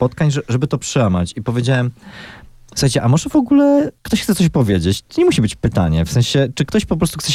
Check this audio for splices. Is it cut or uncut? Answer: uncut